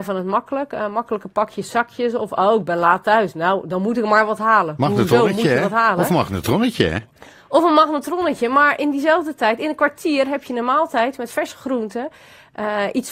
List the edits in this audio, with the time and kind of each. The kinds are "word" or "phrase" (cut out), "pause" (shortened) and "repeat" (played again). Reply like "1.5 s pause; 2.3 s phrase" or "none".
none